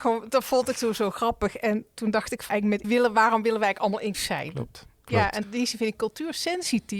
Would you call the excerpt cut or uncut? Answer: cut